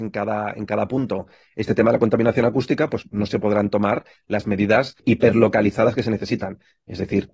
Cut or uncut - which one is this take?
uncut